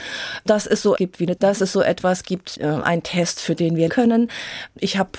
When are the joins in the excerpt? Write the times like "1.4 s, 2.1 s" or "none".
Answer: 0.9 s, 1.4 s, 2.5 s, 3.9 s